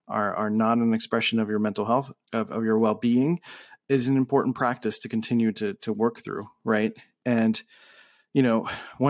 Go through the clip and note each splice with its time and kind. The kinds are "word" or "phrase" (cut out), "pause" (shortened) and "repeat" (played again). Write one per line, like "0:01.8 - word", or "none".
0:02.2 - word